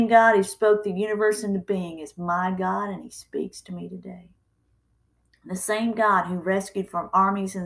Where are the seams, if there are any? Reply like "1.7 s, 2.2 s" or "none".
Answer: none